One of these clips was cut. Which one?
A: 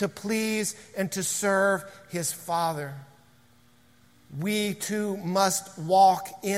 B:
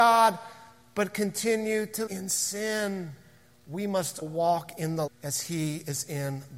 B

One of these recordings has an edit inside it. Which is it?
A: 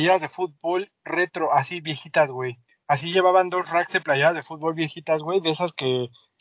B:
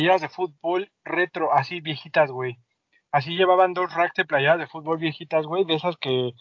A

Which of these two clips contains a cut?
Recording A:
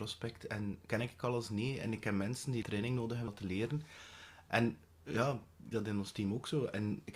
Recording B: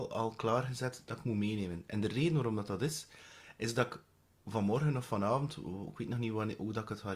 A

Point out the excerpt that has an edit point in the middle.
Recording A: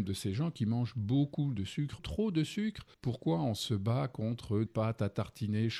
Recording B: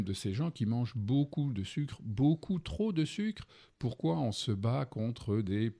A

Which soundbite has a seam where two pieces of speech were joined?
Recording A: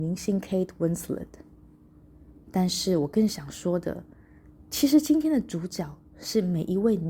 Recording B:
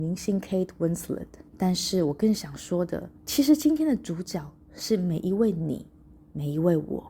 B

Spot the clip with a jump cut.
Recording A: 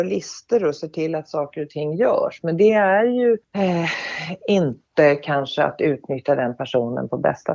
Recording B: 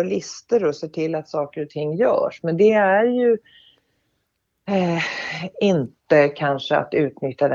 A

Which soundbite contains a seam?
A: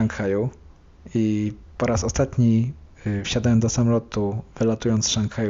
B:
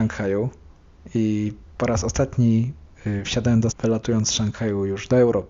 B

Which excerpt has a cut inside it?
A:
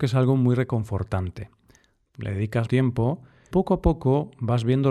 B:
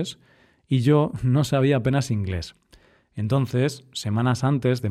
A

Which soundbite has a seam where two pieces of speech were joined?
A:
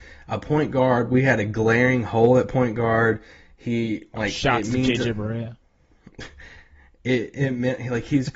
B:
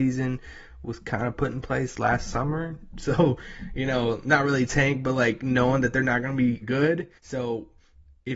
B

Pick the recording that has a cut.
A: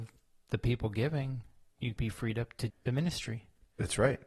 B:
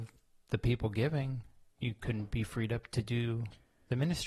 A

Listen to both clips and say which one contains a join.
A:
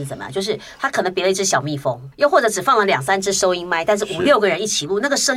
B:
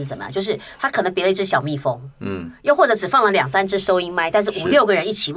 A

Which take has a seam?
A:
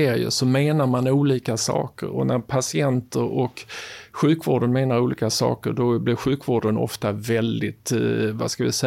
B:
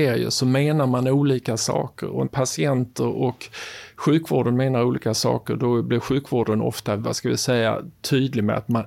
B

